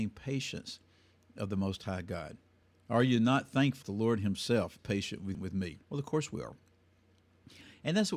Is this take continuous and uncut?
no; 5 cuts; at 2.6 s, 3.8 s, 4.8 s, 5.3 s, 5.8 s

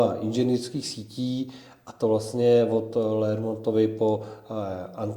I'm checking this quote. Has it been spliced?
no; 0 cuts

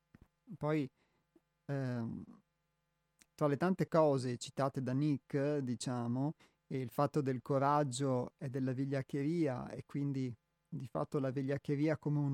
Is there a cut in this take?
no; 0 cuts

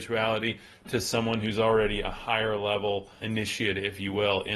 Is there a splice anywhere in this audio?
yes; 1 cut; at 3.2 s

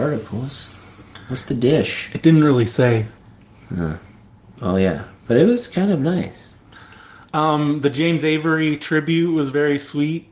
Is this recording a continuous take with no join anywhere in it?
no; 1 cut; at 5.2 s

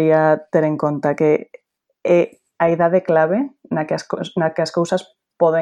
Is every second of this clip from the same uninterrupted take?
yes; 0 cuts

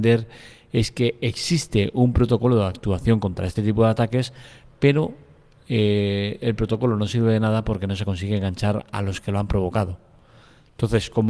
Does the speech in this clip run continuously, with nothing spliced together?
yes; 0 cuts

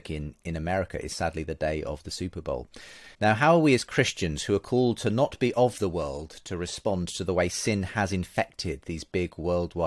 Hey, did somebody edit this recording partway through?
yes; 1 cut; at 3.1 s

